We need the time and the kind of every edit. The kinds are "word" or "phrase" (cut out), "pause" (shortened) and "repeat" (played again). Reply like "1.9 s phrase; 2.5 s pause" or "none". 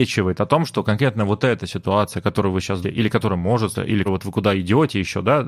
2.8 s word; 3.7 s word; 4.1 s word